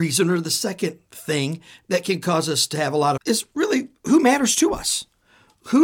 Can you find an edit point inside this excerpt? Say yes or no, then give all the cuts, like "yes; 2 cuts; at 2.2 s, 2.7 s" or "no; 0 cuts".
yes; 1 cut; at 3.2 s